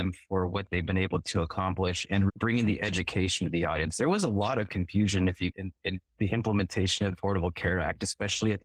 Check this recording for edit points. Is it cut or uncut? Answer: cut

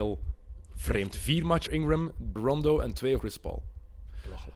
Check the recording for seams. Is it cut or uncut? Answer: cut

